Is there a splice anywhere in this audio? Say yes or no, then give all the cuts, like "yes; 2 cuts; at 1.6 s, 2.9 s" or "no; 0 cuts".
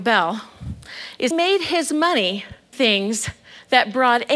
yes; 2 cuts; at 1.3 s, 2.7 s